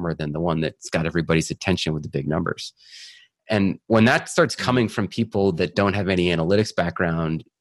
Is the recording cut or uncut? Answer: uncut